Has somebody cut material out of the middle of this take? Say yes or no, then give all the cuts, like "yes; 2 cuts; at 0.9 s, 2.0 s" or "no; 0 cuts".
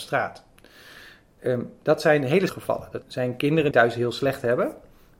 yes; 3 cuts; at 2.5 s, 3.0 s, 3.7 s